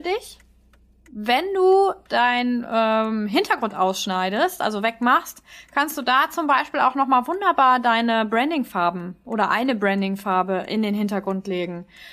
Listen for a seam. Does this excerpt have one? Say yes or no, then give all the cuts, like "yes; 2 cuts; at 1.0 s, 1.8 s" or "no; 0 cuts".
no; 0 cuts